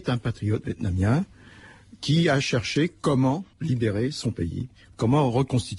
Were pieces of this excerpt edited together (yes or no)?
yes